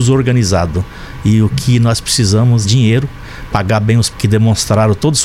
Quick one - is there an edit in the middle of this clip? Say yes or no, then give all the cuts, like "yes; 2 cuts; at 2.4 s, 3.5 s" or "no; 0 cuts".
yes; 2 cuts; at 2.6 s, 4.1 s